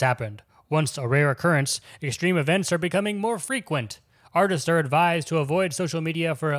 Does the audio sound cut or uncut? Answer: uncut